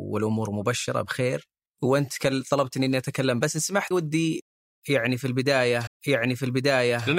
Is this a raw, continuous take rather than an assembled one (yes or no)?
no